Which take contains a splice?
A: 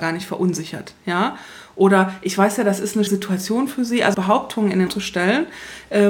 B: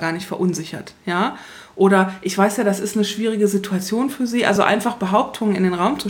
A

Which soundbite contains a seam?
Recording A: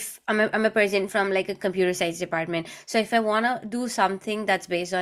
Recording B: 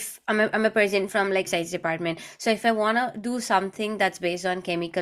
B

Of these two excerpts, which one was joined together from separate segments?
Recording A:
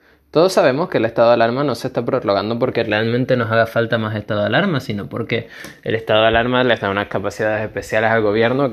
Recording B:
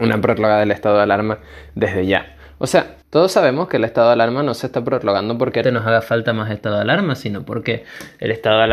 B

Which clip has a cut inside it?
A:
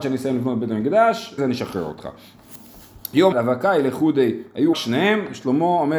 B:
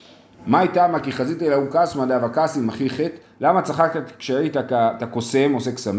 A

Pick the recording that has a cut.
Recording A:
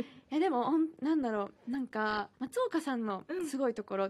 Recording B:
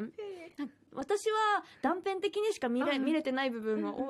A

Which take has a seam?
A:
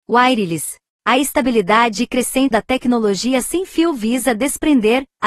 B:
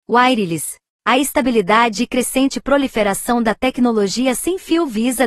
A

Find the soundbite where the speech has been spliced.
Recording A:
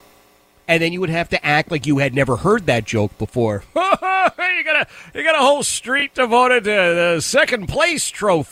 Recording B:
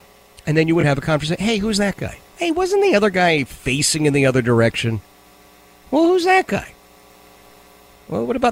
B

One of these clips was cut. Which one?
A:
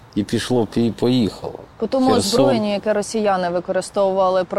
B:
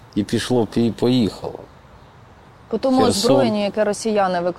A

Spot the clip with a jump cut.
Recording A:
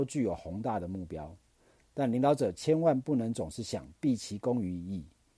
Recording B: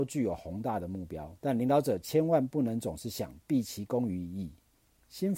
B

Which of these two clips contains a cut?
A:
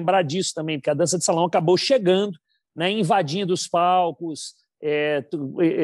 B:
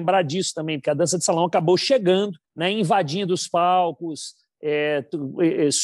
B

